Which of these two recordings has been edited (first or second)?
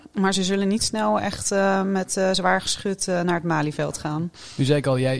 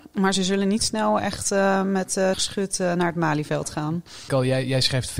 second